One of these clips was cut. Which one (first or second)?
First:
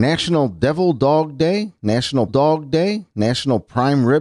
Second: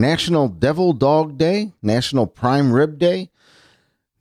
first